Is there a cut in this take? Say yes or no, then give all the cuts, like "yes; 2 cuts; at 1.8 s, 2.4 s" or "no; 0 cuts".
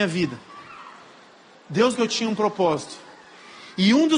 yes; 1 cut; at 1.9 s